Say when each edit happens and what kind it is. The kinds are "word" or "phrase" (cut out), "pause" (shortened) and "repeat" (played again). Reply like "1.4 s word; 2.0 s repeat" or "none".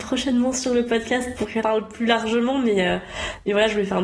1.6 s word